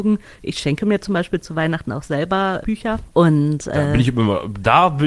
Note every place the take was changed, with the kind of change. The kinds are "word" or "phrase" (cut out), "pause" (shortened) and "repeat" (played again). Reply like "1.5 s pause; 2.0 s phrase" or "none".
2.6 s word